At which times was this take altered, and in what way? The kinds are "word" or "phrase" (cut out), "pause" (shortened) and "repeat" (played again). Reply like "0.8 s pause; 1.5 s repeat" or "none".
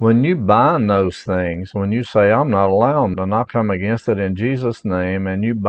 3.1 s word

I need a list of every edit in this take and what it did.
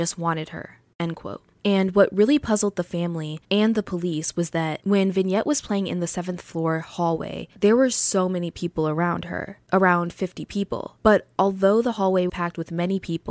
12.3 s word

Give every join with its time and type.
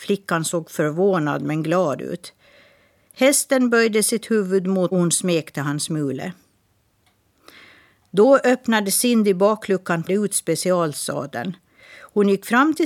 4.9 s phrase; 10.1 s phrase

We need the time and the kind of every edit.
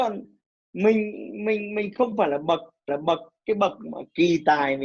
2.9 s repeat

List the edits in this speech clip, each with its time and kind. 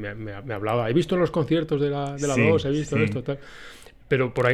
none

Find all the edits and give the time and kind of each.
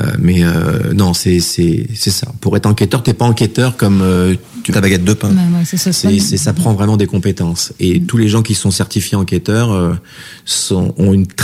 4.7 s phrase

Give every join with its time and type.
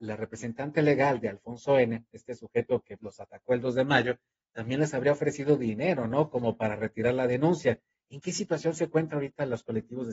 3.0 s word

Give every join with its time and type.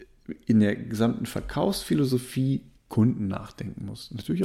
2.8 s phrase

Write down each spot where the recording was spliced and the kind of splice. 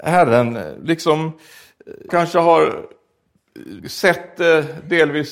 2.1 s phrase; 3.8 s pause

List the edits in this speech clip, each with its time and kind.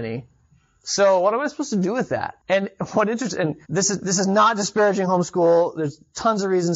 2.4 s pause; 3.6 s pause

